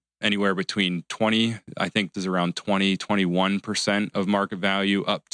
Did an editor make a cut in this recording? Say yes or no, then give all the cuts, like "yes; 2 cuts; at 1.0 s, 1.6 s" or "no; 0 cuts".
yes; 1 cut; at 2.1 s